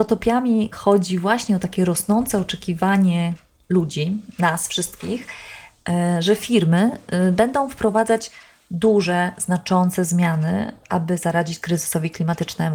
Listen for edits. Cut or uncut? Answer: uncut